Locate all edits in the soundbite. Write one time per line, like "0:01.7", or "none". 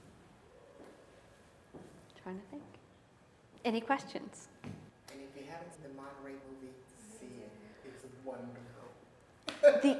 0:04.9
0:05.7
0:06.4